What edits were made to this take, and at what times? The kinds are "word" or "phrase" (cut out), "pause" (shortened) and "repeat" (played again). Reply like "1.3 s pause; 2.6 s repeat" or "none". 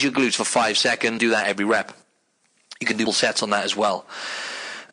1.2 s word; 3.1 s word